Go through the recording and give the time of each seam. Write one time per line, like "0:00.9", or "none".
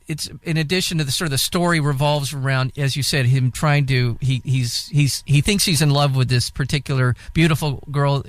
none

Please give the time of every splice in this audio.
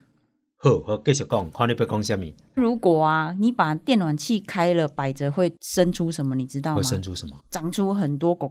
0:02.6
0:07.4

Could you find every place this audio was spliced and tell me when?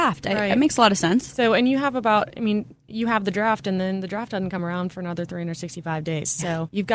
none

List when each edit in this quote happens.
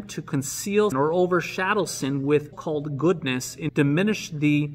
0:00.9
0:02.5
0:03.7

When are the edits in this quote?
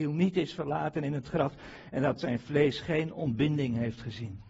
none

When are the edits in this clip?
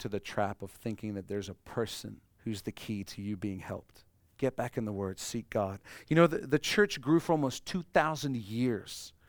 0:02.3
0:04.2

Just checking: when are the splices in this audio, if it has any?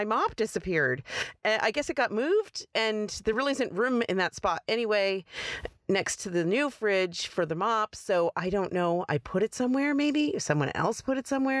none

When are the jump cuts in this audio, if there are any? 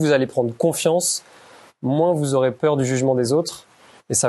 none

